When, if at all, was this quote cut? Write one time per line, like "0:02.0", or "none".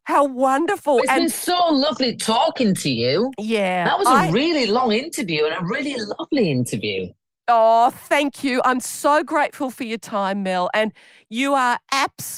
none

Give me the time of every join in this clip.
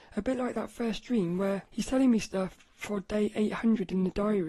0:01.7

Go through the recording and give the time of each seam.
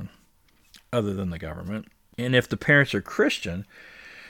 none

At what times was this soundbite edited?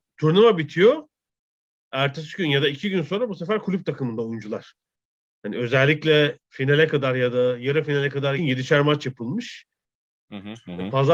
0:08.4

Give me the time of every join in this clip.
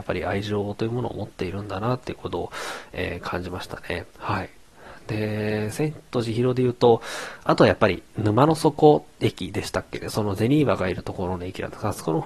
0:04.1

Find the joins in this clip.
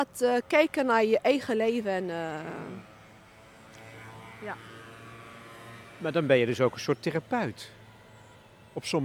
none

